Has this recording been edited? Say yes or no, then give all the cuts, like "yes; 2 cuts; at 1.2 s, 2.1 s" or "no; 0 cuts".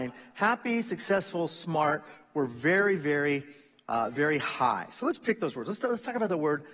no; 0 cuts